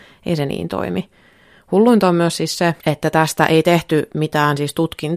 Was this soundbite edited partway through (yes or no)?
yes